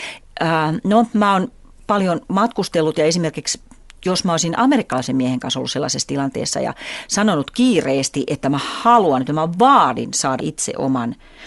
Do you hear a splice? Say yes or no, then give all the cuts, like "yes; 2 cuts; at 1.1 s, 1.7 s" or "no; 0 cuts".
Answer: yes; 1 cut; at 10.4 s